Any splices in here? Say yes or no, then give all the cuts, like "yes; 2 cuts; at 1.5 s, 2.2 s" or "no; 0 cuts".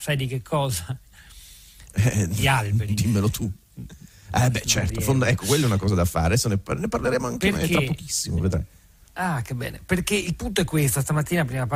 no; 0 cuts